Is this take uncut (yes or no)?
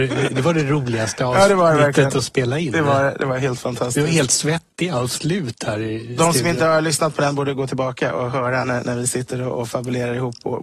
yes